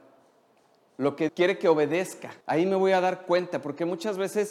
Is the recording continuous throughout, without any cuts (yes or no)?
no